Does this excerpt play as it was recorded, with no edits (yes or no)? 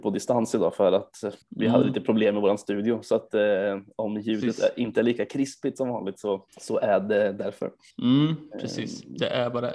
no